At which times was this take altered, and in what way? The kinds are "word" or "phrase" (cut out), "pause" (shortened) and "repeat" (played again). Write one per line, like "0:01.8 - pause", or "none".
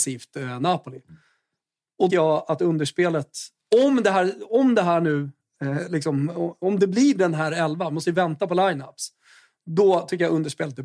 0:02.1 - phrase

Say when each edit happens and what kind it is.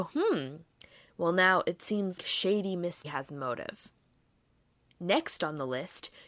0:02.2 - word
0:03.0 - word

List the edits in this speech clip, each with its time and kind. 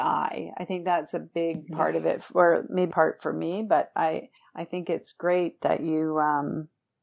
0:02.9 - phrase
0:04.4 - pause

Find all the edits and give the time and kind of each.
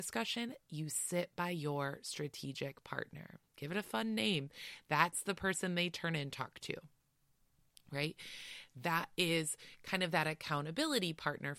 none

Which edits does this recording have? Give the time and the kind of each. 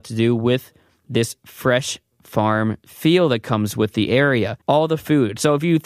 0:04.6 - pause

